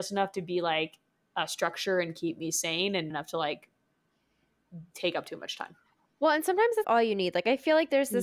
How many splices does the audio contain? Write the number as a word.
two